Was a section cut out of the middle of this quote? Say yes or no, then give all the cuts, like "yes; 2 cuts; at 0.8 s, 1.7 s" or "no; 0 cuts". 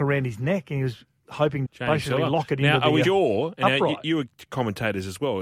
yes; 2 cuts; at 1.7 s, 3.0 s